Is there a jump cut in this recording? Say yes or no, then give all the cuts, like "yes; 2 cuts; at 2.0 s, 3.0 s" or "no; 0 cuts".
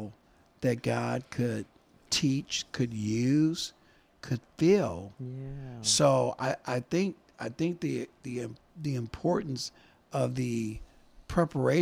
no; 0 cuts